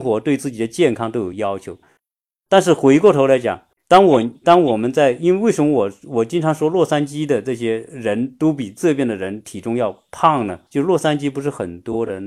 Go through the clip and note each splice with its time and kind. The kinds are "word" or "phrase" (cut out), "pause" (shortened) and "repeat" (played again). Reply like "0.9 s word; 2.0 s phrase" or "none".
3.7 s pause; 10.7 s pause